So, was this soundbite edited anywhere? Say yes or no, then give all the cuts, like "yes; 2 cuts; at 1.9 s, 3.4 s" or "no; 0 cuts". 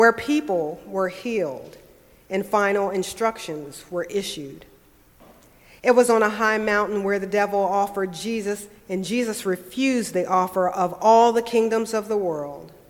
no; 0 cuts